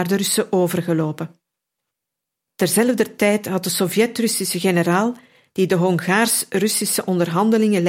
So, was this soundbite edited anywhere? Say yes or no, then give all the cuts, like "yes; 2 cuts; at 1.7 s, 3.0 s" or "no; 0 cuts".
no; 0 cuts